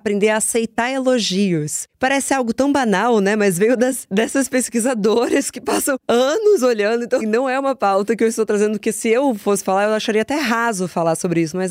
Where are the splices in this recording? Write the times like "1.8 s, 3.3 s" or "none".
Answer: 7.2 s